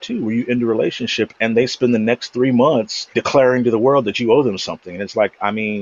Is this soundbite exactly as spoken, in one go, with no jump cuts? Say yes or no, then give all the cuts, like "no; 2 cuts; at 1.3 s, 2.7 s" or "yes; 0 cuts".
no; 1 cut; at 3.1 s